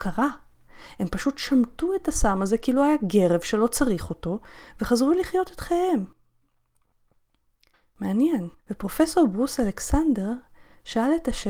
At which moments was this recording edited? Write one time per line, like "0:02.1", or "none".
0:08.6